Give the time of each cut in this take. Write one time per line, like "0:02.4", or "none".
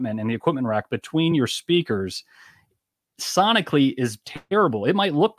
none